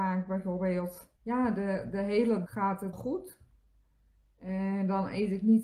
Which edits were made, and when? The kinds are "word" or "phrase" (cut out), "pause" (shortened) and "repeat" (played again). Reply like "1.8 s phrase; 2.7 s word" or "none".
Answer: 1.2 s pause; 2.5 s word; 2.9 s word